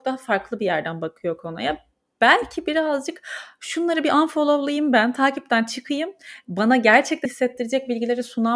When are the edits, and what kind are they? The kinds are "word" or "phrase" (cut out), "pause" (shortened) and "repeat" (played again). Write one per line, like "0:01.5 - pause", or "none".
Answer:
0:07.3 - word